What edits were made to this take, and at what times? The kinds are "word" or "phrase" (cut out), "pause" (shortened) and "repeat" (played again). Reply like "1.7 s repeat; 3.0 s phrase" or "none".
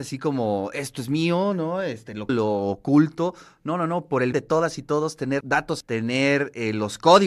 2.3 s word; 4.3 s word; 5.4 s word; 5.8 s word